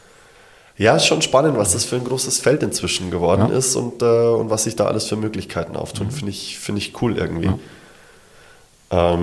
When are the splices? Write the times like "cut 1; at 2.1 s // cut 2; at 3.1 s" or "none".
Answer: none